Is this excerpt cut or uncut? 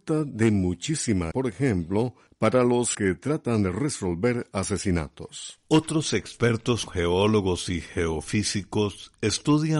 cut